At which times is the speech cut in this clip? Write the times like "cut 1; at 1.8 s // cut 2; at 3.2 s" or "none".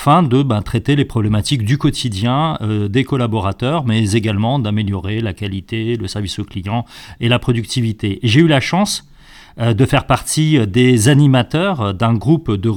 none

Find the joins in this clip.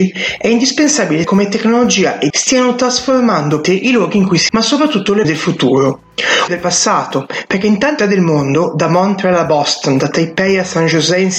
cut 1; at 1.2 s // cut 2; at 2.3 s // cut 3; at 3.6 s // cut 4; at 4.5 s // cut 5; at 5.2 s // cut 6; at 6.5 s // cut 7; at 8.0 s

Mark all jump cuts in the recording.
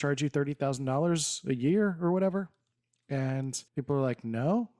cut 1; at 3.7 s

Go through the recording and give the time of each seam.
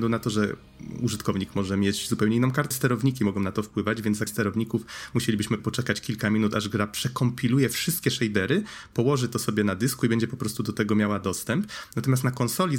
cut 1; at 2.7 s // cut 2; at 4.3 s // cut 3; at 5.6 s

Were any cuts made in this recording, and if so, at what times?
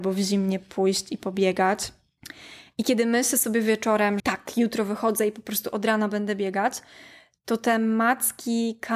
cut 1; at 4.2 s

